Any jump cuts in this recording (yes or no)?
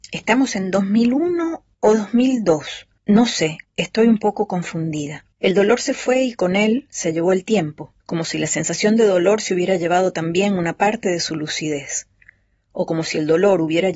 yes